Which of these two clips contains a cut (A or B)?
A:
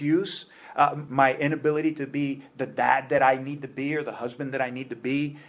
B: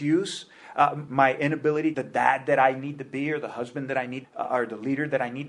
B